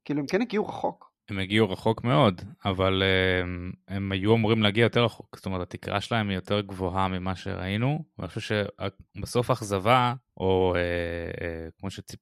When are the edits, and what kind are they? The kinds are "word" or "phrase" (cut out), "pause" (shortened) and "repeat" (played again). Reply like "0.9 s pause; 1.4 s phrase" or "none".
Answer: 1.2 s pause; 10.3 s pause